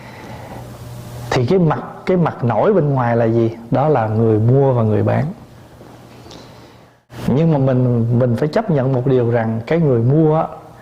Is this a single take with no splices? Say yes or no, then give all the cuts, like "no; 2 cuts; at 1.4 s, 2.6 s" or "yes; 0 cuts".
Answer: yes; 0 cuts